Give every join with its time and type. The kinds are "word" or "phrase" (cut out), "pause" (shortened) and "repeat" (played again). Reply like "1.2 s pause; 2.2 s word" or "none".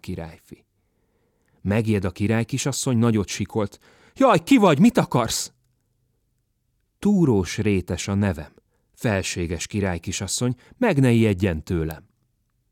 none